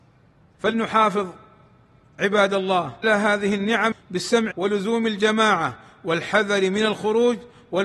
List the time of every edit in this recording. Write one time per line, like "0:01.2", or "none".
0:03.0
0:03.9
0:04.5